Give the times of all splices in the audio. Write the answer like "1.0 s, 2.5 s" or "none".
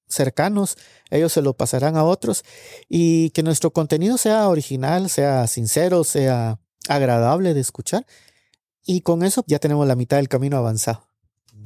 9.4 s